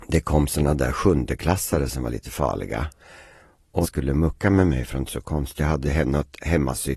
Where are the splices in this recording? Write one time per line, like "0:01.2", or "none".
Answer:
0:03.8
0:05.1
0:05.6